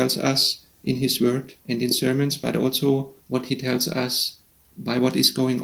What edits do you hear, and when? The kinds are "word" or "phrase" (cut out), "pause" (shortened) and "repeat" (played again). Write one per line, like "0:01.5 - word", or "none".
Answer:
0:01.6 - pause
0:03.2 - pause
0:04.5 - pause